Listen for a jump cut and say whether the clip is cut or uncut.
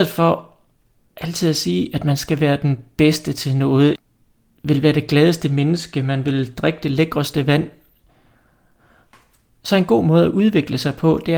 uncut